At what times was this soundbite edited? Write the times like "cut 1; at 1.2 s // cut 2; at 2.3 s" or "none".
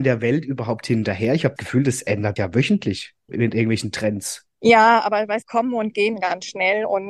cut 1; at 1.6 s // cut 2; at 2.4 s // cut 3; at 3.3 s // cut 4; at 4.5 s // cut 5; at 5.4 s